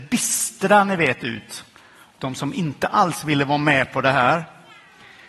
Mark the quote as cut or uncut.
uncut